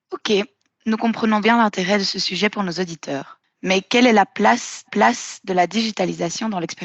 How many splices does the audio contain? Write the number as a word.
two